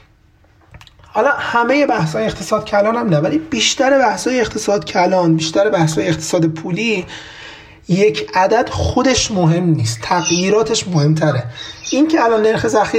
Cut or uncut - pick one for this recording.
uncut